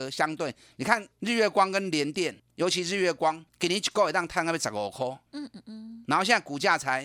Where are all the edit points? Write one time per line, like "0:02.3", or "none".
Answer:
0:01.1